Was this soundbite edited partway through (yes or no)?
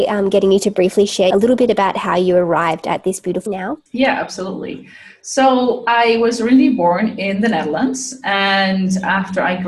yes